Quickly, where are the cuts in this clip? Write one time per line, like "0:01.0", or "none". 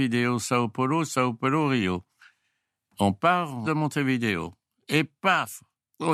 0:03.6